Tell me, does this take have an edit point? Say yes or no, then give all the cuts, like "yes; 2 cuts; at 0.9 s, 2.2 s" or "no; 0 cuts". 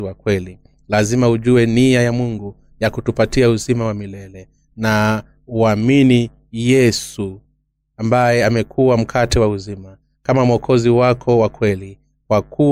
no; 0 cuts